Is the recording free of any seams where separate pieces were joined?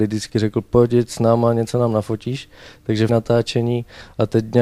no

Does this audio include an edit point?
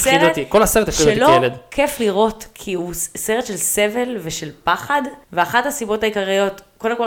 yes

